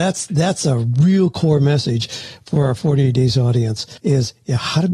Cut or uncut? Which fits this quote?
cut